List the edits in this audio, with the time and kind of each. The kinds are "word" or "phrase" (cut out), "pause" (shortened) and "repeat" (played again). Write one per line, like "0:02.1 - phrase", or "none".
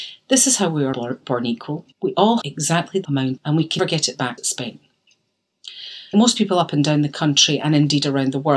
0:00.9 - word
0:01.9 - pause
0:02.4 - word
0:03.0 - word
0:03.4 - phrase
0:03.8 - word
0:04.4 - word
0:06.1 - word